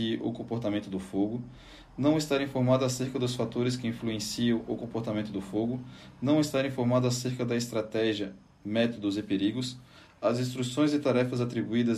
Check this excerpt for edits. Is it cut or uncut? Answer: uncut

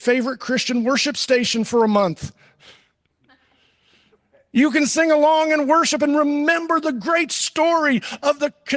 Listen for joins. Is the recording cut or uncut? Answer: uncut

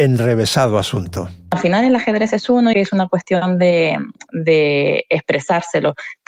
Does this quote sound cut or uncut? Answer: cut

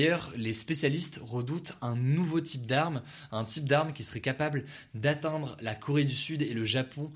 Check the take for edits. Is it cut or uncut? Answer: uncut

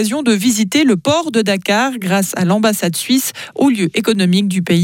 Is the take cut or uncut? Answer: uncut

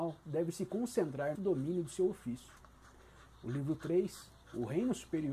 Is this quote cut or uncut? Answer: cut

